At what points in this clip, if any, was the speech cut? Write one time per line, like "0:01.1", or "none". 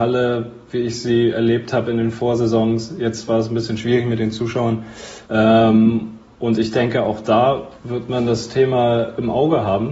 0:05.2
0:07.8